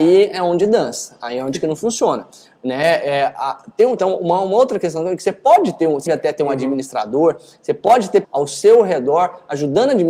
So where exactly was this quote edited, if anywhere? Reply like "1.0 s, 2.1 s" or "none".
4.0 s, 6.1 s, 8.2 s